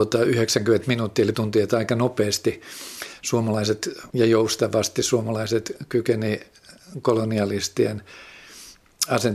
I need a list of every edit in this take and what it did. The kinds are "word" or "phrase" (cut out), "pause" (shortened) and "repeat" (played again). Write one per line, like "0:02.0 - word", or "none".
0:01.3 - word
0:04.1 - word

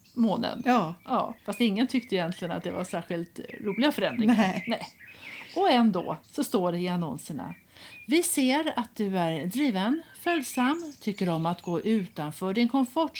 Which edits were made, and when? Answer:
0:01.4 - pause

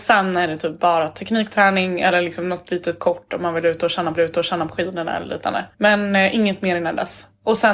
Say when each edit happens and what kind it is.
0:04.2 - repeat
0:05.7 - pause

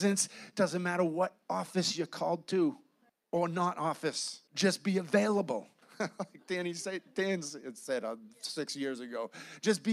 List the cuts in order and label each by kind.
0:01.4 - pause
0:03.1 - pause
0:04.5 - pause
0:05.8 - pause

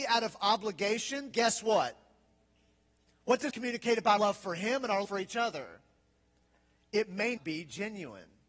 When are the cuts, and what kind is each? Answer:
0:01.3 - word
0:03.5 - word
0:04.2 - word
0:05.0 - word
0:07.4 - word

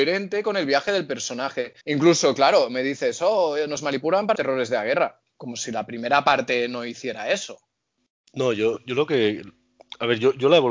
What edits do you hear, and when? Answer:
0:01.8 - pause
0:04.3 - word

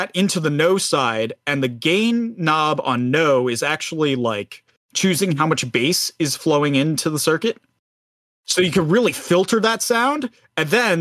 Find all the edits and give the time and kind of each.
none

